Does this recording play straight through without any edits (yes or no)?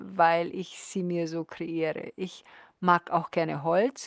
yes